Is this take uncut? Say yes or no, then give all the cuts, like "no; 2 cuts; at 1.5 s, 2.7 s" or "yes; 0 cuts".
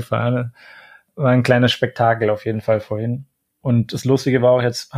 yes; 0 cuts